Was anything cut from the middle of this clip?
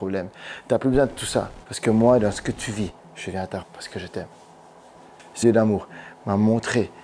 yes; 3 cuts; at 1.6 s, 3.6 s, 5.4 s

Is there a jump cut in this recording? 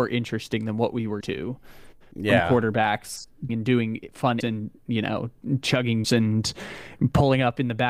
yes; 4 cuts; at 1.2 s, 3.5 s, 4.4 s, 6.0 s

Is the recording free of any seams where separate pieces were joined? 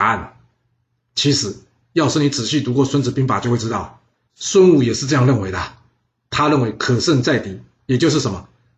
yes; 0 cuts

